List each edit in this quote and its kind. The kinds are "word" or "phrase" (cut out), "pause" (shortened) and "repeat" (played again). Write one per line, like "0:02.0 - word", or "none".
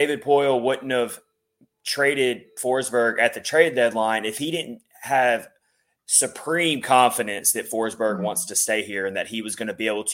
none